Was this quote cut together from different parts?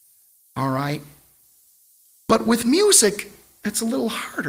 no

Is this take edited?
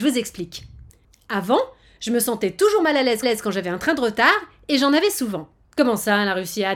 yes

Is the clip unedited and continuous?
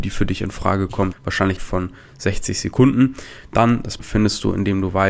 no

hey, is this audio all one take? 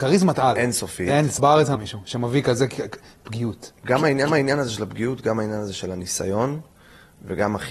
no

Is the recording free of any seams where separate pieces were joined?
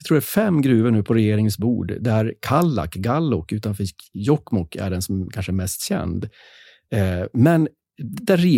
yes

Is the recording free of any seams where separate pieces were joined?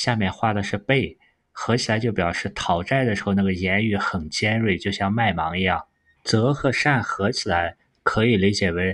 yes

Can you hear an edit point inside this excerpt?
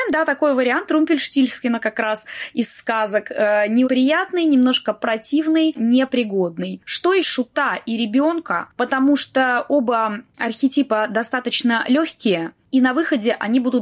yes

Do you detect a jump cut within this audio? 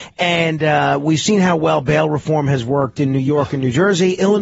no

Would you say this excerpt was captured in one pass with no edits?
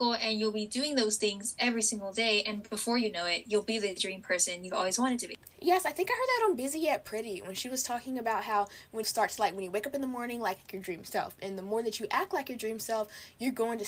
no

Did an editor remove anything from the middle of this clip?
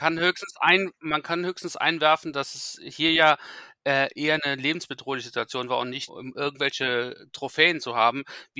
yes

